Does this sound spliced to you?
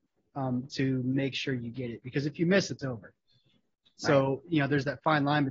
no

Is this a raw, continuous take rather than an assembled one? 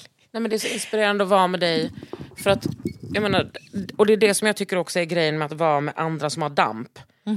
yes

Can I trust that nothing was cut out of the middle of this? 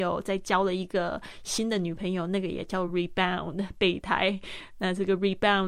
yes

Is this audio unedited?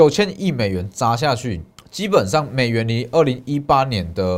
no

